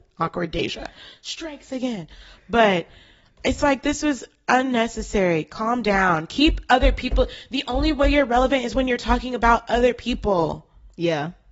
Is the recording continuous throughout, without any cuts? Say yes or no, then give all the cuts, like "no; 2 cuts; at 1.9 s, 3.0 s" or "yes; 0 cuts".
yes; 0 cuts